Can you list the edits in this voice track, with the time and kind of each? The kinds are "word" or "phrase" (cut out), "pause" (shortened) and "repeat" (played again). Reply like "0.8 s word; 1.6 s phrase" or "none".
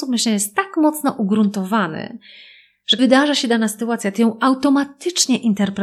3.0 s word